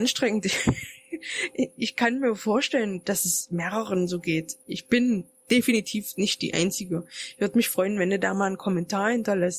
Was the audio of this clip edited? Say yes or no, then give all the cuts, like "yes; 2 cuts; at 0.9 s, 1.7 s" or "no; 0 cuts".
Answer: no; 0 cuts